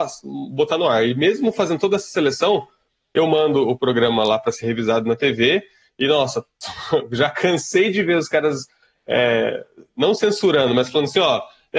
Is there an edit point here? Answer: no; 0 cuts

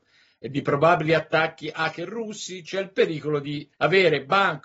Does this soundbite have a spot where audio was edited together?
yes; 1 cut; at 3.7 s

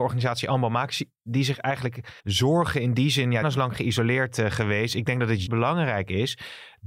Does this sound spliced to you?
yes; 3 cuts; at 2.2 s, 3.4 s, 5.5 s

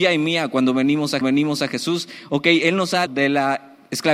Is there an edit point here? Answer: yes; 2 cuts; at 1.2 s, 3.1 s

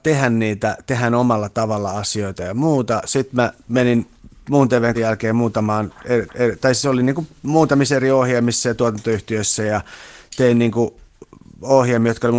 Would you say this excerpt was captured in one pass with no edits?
no; 4 cuts; at 3.6 s, 4.9 s, 6.3 s, 7.4 s

